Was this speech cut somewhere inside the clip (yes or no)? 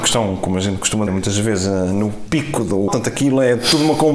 yes